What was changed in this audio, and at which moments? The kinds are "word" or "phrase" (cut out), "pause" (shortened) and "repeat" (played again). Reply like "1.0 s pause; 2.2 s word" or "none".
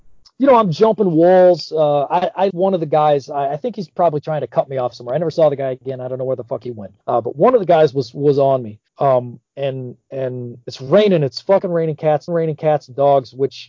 2.5 s word; 7.0 s pause; 8.9 s pause; 12.3 s repeat